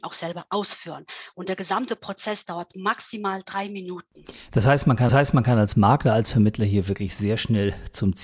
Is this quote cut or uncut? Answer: cut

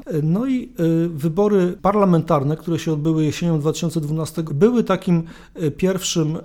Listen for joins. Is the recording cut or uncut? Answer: cut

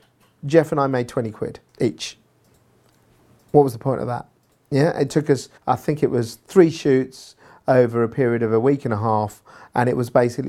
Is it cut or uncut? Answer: cut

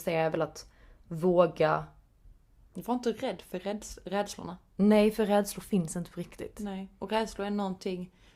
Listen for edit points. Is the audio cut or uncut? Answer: uncut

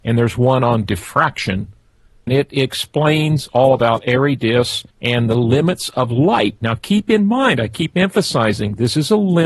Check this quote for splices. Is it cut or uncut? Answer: cut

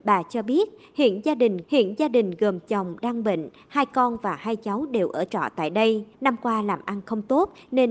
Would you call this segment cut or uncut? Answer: cut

